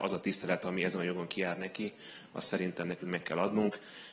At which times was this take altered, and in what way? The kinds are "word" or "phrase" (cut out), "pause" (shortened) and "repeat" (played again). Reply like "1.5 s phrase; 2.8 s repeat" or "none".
none